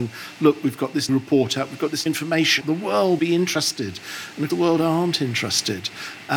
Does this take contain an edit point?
yes; 5 cuts; at 1.1 s, 2.1 s, 2.6 s, 3.2 s, 4.5 s

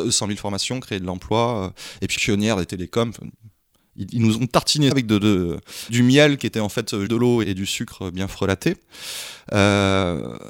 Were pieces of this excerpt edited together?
yes; 5 cuts; at 2.2 s, 4.9 s, 5.9 s, 7.1 s, 7.4 s

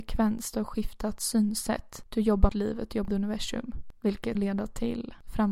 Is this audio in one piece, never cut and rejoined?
no; 3 cuts; at 2.5 s, 3.1 s, 4.3 s

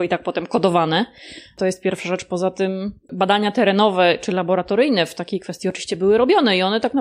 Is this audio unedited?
yes; 0 cuts

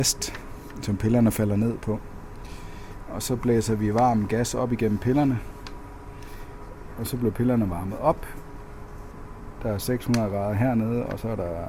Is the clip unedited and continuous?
yes; 0 cuts

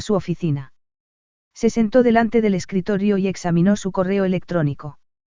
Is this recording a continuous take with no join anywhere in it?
yes; 0 cuts

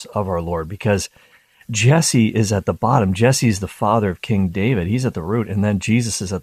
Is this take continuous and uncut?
yes; 0 cuts

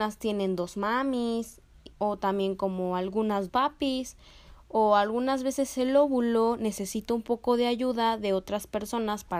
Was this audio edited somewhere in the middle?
yes; 2 cuts; at 1.9 s, 3.5 s

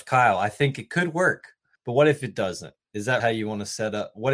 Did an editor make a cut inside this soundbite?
yes; 2 cuts; at 1.8 s, 3.2 s

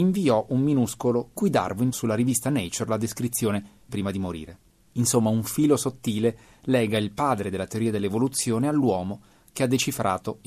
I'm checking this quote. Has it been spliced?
yes; 3 cuts; at 1.4 s, 1.9 s, 3.9 s

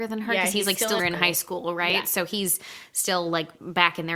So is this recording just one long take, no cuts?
no; 1 cut; at 1.0 s

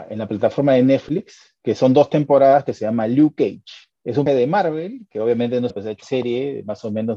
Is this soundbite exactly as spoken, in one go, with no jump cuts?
no; 4 cuts; at 4.0 s, 4.3 s, 5.7 s, 6.0 s

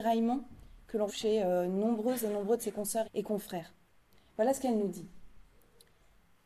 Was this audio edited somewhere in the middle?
yes; 2 cuts; at 1.1 s, 3.0 s

